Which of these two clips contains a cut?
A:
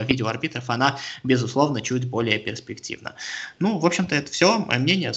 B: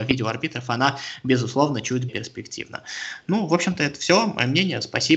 B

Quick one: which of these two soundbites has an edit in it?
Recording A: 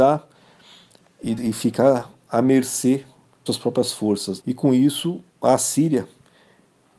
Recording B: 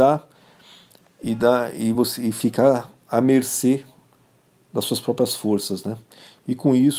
A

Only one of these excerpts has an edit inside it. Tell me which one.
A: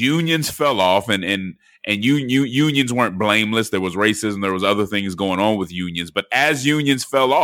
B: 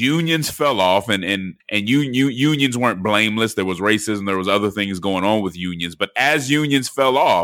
B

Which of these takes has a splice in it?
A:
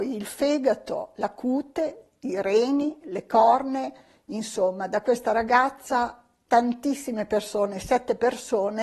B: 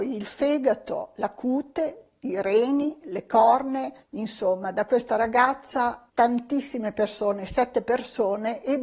B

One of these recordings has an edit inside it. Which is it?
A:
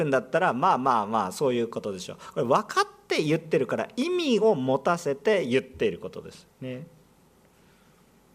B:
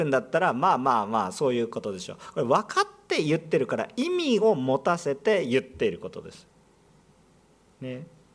A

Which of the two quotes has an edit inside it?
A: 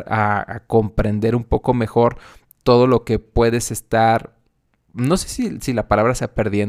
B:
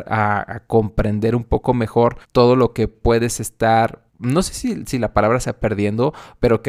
B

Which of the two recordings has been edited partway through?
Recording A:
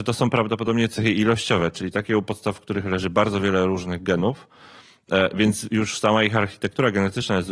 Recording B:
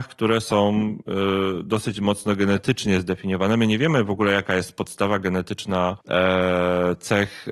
B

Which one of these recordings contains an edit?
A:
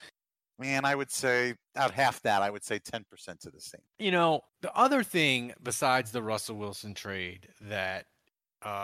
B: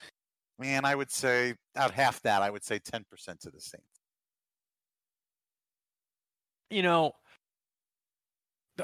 A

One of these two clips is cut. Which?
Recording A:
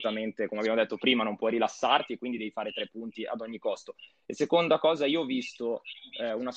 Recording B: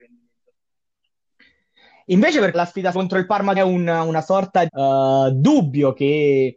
B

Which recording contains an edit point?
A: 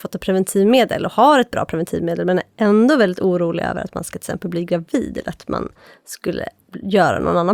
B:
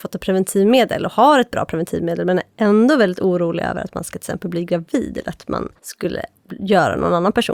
B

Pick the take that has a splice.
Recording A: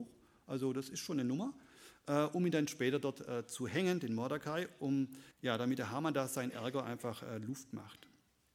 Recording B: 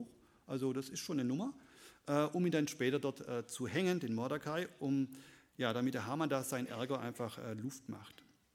A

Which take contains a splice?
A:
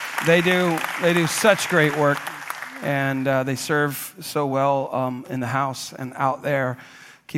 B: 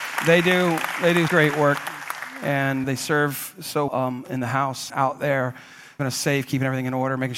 B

